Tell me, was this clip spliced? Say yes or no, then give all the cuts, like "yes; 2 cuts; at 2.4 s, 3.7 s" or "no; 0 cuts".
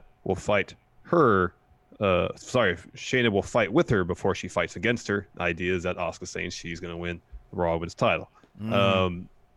no; 0 cuts